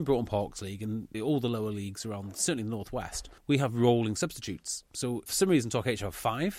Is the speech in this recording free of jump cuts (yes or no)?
no